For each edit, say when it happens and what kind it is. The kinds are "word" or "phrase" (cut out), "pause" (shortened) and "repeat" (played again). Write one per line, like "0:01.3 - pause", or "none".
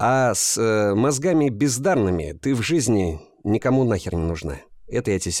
none